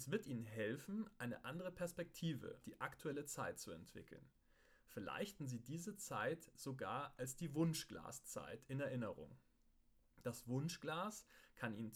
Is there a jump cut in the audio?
yes; 2 cuts; at 2.6 s, 5.4 s

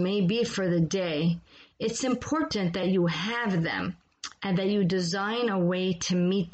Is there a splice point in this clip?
no; 0 cuts

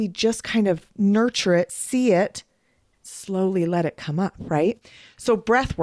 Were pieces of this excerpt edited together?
no; 0 cuts

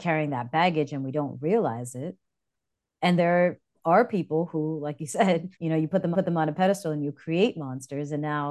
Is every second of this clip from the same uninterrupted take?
no; 3 cuts; at 3.2 s, 5.5 s, 6.1 s

